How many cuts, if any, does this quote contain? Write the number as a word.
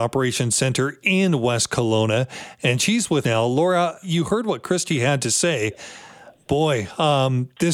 two